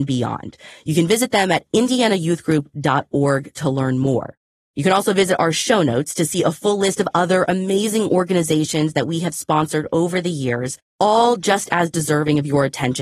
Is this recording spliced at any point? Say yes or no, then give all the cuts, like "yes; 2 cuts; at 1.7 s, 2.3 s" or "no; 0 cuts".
no; 0 cuts